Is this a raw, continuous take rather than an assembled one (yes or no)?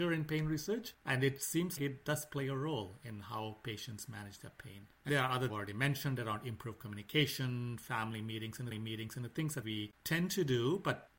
no